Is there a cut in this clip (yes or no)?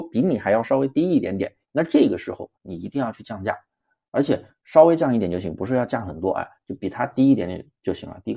yes